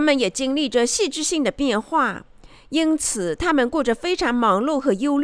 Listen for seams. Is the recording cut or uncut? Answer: uncut